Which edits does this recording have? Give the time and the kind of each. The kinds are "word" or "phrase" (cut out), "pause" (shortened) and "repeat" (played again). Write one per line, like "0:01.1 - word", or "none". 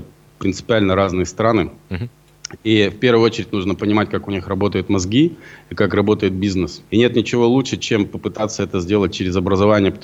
0:06.9 - pause